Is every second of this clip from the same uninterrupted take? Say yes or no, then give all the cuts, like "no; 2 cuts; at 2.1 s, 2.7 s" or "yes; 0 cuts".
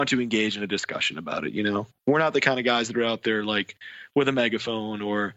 yes; 0 cuts